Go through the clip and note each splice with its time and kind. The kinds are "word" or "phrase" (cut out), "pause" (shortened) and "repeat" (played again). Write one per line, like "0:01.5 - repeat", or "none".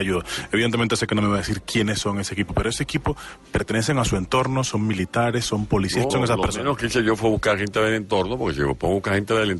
0:06.1 - word